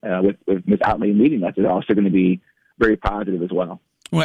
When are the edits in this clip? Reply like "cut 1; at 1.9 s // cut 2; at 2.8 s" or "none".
none